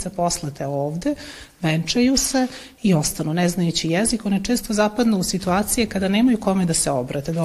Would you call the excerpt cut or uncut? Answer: uncut